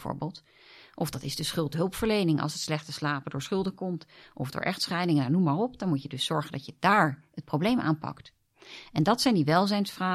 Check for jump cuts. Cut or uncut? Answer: uncut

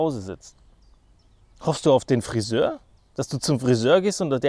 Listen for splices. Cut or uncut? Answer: uncut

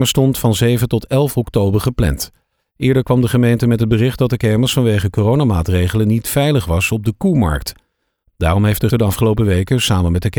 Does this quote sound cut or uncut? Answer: cut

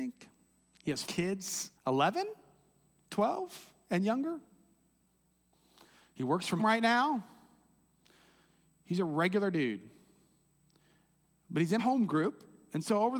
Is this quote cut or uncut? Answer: cut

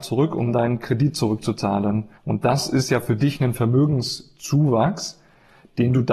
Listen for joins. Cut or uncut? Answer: cut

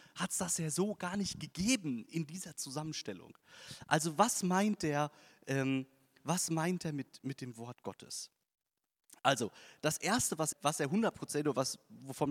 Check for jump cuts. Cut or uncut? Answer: cut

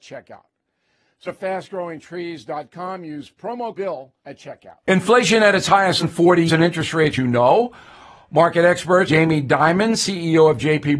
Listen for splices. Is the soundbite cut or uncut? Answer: cut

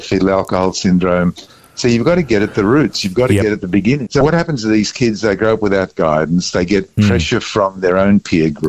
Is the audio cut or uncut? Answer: uncut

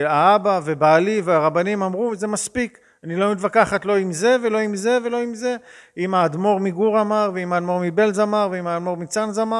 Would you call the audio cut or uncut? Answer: uncut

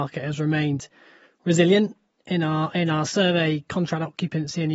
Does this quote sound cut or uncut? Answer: uncut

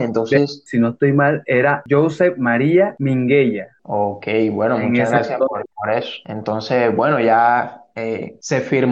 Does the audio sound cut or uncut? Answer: uncut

